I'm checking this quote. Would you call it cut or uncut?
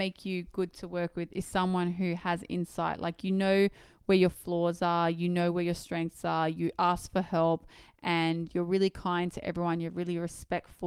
uncut